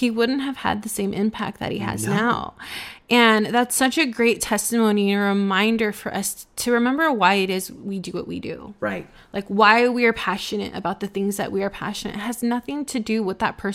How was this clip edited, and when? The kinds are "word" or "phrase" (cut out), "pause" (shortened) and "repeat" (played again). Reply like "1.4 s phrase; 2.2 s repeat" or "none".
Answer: none